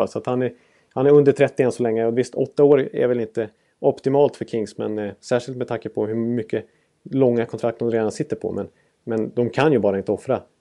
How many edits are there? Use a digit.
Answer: 0